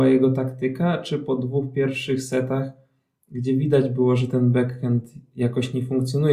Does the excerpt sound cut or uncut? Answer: uncut